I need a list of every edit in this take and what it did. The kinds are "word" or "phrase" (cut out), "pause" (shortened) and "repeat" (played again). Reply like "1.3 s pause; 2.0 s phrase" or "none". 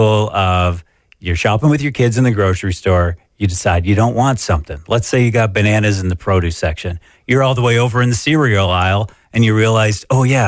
none